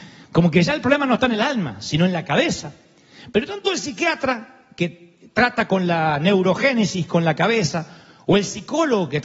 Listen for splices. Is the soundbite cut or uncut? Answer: uncut